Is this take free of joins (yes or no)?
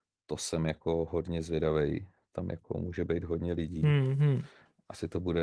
yes